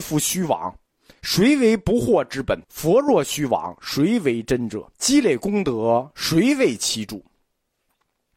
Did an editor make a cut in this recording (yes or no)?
yes